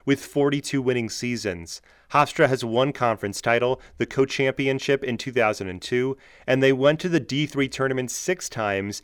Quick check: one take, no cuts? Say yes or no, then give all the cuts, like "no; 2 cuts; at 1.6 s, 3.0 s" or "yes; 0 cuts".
yes; 0 cuts